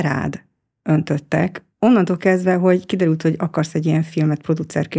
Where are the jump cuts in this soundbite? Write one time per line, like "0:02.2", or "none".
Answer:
0:01.7